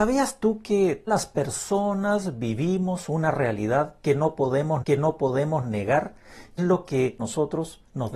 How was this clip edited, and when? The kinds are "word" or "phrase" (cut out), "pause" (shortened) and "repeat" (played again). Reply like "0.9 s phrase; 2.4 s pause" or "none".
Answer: 1.1 s word; 4.8 s repeat; 6.6 s word; 7.2 s phrase